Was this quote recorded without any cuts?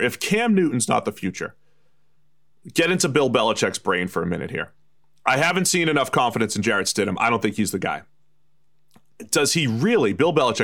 yes; 0 cuts

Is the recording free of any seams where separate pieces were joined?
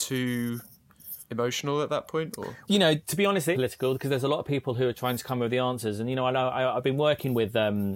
no; 3 cuts; at 1.3 s, 2.6 s, 3.5 s

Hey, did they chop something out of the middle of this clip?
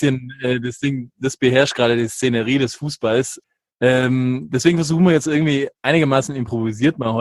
no; 0 cuts

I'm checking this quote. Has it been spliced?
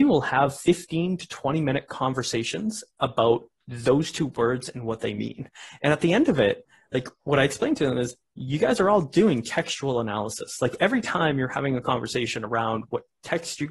no; 0 cuts

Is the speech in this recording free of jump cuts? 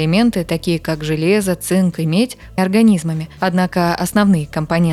no; 1 cut; at 2.6 s

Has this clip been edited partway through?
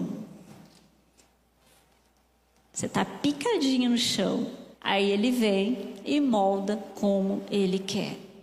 yes; 1 cut; at 4.7 s

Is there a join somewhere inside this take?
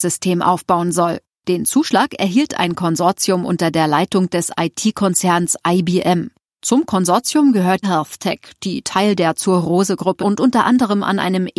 yes; 2 cuts; at 7.8 s, 10.2 s

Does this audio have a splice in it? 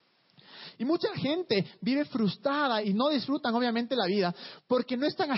yes; 1 cut; at 2.8 s

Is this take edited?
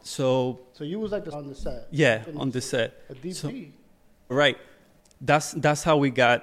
yes; 2 cuts; at 1.3 s, 4.3 s

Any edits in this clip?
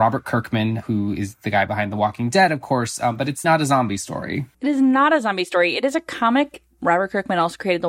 yes; 2 cuts; at 3.4 s, 4.5 s

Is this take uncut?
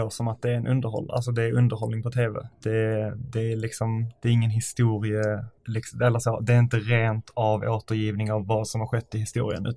no; 1 cut; at 5.6 s

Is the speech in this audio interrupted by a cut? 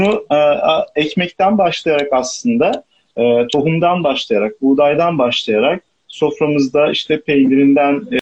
no; 0 cuts

